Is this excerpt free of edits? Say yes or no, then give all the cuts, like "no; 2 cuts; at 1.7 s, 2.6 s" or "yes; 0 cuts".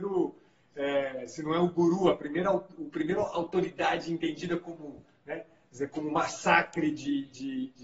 yes; 0 cuts